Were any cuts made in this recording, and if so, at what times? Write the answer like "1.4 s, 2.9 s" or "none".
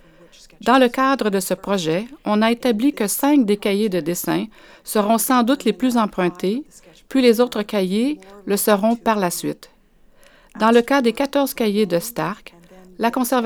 none